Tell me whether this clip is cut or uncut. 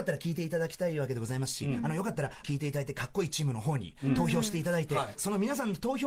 cut